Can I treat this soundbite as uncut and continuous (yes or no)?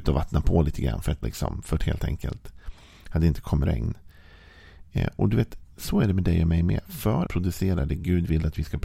no